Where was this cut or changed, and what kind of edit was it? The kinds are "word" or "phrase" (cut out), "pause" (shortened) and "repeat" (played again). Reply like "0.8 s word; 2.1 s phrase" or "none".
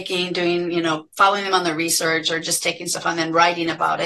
none